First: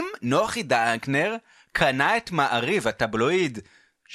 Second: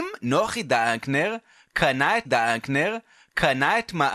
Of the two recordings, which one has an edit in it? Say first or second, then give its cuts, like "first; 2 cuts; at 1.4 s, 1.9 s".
second; 1 cut; at 2.3 s